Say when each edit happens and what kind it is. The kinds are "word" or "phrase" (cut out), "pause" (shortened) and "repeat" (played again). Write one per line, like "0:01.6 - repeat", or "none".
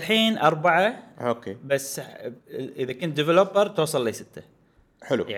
0:02.4 - pause